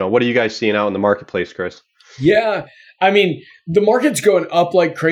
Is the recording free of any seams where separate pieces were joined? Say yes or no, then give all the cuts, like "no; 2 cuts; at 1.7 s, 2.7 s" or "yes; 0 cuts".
yes; 0 cuts